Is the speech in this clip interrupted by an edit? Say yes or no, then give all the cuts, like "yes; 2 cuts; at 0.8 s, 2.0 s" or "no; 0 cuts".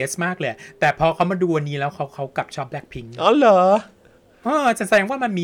no; 0 cuts